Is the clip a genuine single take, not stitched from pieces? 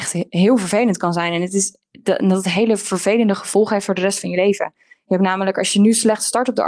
yes; 0 cuts

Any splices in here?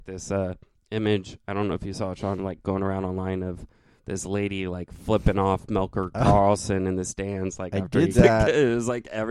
yes; 1 cut; at 8.1 s

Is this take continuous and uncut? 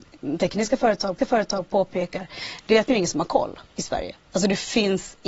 no; 4 cuts; at 1.2 s, 2.9 s, 3.7 s, 4.3 s

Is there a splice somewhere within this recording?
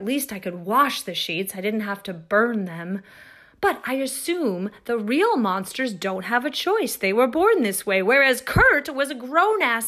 no; 0 cuts

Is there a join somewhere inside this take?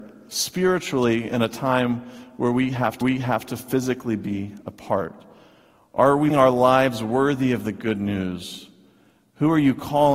yes; 2 cuts; at 3.0 s, 6.3 s

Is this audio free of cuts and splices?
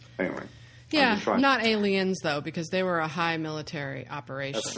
yes; 0 cuts

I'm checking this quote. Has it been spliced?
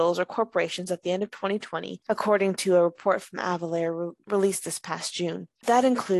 no; 0 cuts

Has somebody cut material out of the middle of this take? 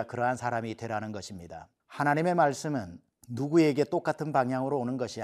yes; 1 cut; at 1.8 s

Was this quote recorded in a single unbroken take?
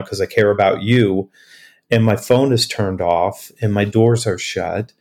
yes; 0 cuts

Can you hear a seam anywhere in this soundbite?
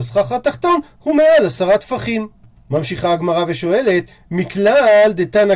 no; 0 cuts

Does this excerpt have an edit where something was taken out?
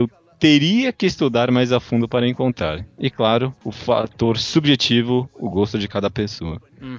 no; 0 cuts

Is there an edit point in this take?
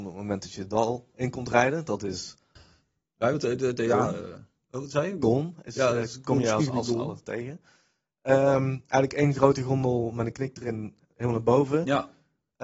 no; 0 cuts

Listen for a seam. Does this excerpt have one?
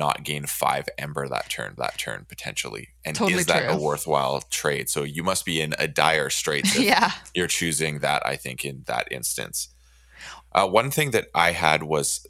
yes; 1 cut; at 1.8 s

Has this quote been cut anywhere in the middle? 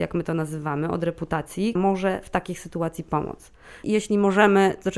yes; 1 cut; at 1.8 s

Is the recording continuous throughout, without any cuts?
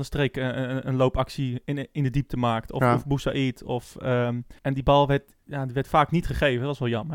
no; 1 cut; at 4.6 s

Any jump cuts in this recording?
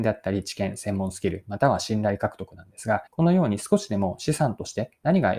yes; 1 cut; at 3.1 s

